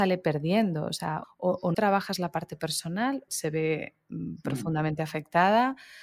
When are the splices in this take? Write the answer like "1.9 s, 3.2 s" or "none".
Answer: 1.2 s, 1.7 s, 3.3 s